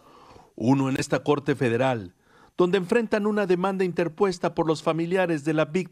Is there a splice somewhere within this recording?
no; 0 cuts

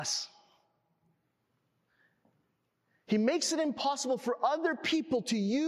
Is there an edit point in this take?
no; 0 cuts

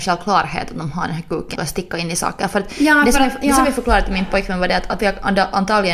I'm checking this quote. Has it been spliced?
yes; 2 cuts; at 1.6 s, 5.0 s

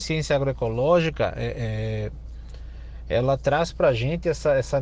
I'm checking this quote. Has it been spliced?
no; 0 cuts

